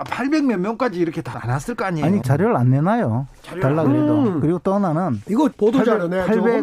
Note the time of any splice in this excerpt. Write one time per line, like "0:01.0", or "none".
0:01.3
0:02.2
0:05.5